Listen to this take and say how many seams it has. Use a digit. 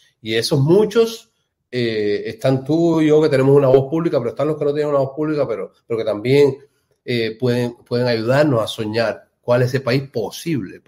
0